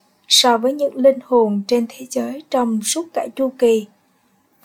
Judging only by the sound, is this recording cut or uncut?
uncut